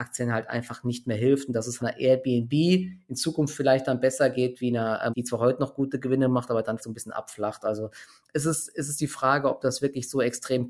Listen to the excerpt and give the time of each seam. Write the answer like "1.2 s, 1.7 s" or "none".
1.8 s, 5.1 s, 6.8 s